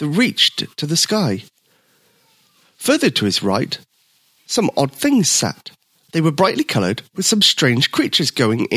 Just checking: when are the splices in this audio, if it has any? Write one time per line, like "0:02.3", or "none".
0:06.0